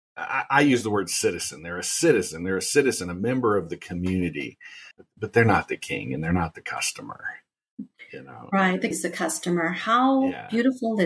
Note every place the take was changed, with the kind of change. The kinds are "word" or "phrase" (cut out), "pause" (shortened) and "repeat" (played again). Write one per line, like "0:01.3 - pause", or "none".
0:04.9 - pause
0:08.9 - word